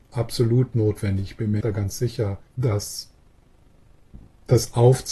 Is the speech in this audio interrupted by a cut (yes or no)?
yes